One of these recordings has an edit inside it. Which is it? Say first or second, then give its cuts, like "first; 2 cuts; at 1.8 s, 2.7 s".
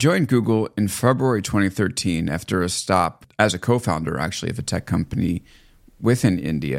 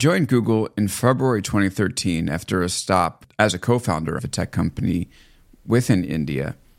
second; 1 cut; at 4.2 s